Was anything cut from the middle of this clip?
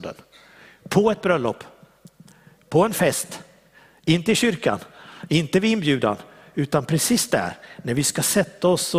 no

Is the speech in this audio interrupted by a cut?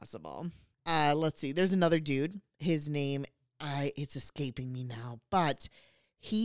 no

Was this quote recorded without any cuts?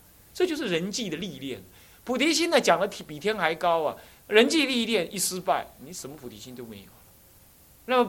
yes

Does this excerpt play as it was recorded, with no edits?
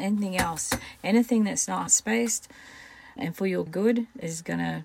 no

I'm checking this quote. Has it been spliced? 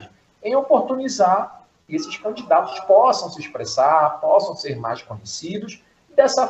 no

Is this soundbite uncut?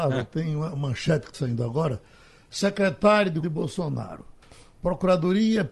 no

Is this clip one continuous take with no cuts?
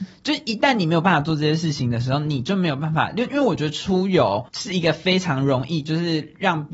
no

